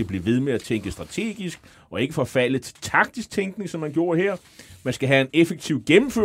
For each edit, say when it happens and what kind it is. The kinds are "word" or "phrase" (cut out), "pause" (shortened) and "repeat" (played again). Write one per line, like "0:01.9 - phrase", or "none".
none